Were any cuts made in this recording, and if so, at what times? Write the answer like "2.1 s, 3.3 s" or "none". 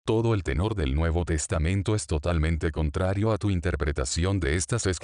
none